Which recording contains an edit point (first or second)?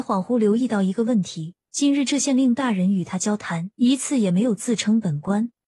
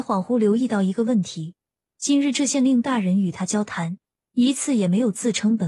first